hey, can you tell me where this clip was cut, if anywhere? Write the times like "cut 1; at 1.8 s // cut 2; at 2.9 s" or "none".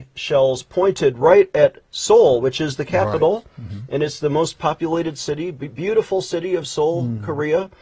cut 1; at 1.8 s